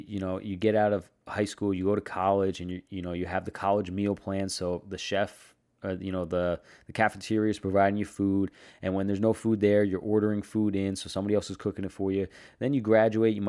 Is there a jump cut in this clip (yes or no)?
no